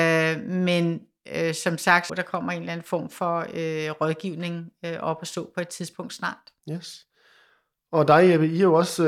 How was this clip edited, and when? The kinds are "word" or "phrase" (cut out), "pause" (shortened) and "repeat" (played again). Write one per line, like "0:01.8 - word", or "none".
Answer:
0:02.1 - phrase
0:06.6 - pause